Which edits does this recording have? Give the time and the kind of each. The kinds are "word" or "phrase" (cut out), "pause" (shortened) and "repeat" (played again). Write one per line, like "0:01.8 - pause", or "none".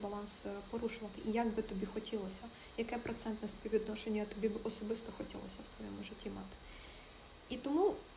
none